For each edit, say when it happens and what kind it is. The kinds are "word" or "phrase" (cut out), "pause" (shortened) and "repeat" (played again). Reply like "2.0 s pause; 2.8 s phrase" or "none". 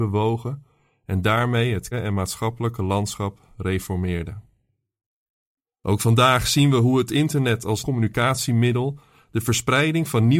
1.9 s word; 3.5 s pause; 7.8 s word